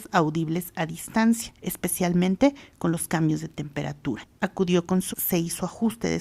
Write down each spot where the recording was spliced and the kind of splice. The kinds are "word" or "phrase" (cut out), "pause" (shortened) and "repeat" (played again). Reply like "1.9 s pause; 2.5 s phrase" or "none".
5.1 s word

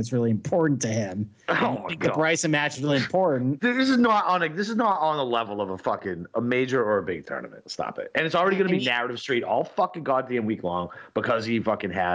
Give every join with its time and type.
none

